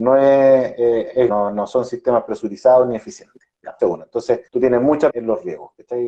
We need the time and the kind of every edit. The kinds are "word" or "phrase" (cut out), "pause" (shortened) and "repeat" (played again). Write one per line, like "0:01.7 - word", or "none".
0:01.3 - word
0:03.8 - word
0:04.5 - pause
0:05.1 - phrase